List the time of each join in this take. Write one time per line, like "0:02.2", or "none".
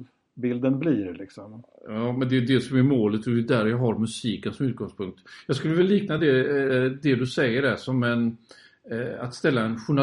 none